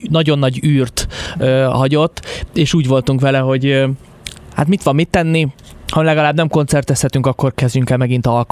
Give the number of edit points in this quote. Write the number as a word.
zero